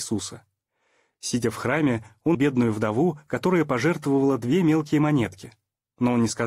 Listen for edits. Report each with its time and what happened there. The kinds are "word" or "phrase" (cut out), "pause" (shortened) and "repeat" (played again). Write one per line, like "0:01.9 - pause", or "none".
0:02.3 - word

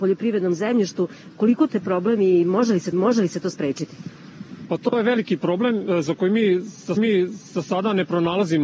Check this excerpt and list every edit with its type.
0:01.7 - word
0:02.9 - repeat
0:07.0 - repeat

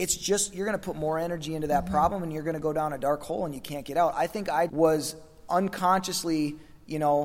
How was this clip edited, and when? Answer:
0:04.7 - word

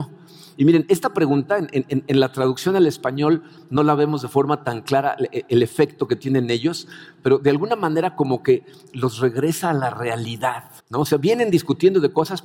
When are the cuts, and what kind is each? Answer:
0:10.8 - pause

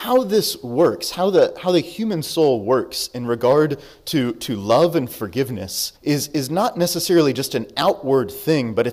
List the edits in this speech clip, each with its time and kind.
0:06.0 - pause

